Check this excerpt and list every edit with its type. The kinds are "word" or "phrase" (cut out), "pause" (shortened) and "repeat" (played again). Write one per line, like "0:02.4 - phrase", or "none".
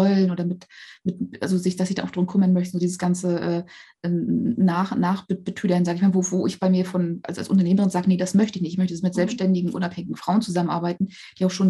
none